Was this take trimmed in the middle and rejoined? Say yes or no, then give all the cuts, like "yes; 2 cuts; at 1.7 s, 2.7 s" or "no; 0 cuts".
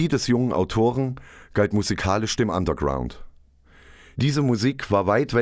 no; 0 cuts